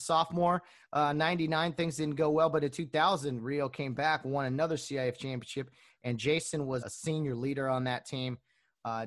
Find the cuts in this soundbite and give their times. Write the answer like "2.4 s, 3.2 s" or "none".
6.8 s